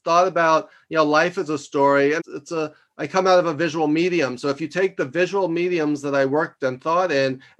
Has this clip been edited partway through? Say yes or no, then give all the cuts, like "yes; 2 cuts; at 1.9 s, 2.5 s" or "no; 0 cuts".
yes; 1 cut; at 2.2 s